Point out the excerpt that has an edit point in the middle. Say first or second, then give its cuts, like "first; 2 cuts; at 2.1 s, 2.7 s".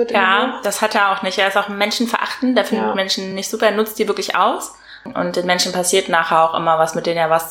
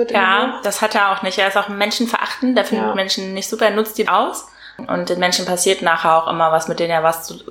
second; 1 cut; at 4.1 s